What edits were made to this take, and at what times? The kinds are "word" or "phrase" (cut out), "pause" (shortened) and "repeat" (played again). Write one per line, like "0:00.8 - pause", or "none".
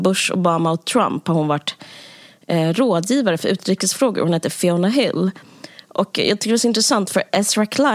none